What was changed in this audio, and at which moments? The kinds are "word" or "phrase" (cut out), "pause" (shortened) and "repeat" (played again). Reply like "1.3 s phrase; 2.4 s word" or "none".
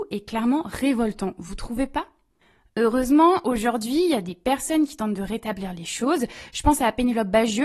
none